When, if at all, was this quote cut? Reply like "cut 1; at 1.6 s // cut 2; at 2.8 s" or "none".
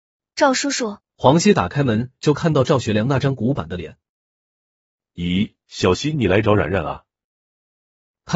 cut 1; at 1.1 s // cut 2; at 5.6 s